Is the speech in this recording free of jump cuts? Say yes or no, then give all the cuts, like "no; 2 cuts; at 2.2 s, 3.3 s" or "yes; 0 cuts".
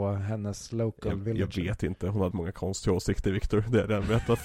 no; 1 cut; at 2.3 s